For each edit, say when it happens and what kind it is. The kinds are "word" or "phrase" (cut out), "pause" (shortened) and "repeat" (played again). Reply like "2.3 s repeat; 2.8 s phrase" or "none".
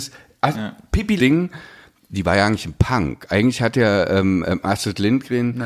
1.2 s phrase